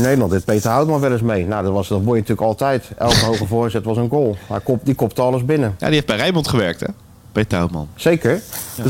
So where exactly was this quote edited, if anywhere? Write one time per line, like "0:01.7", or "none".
none